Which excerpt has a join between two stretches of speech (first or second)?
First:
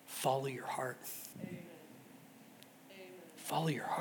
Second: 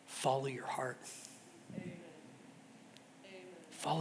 first